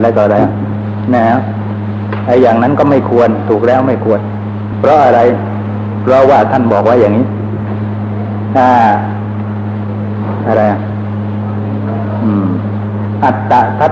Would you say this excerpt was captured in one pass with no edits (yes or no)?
no